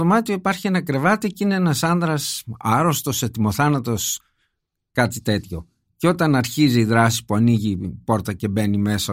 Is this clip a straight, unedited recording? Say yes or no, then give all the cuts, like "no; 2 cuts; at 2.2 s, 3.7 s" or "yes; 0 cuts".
yes; 0 cuts